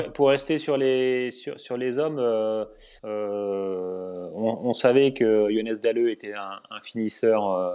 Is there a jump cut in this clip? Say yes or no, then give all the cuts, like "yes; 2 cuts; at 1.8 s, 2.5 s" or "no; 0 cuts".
yes; 1 cut; at 3.0 s